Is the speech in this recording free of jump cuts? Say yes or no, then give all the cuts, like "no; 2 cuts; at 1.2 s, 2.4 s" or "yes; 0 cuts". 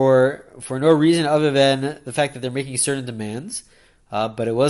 yes; 0 cuts